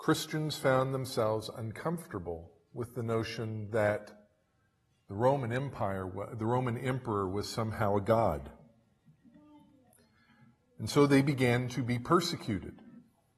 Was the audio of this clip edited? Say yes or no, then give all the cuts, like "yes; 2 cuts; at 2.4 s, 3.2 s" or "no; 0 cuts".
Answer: no; 0 cuts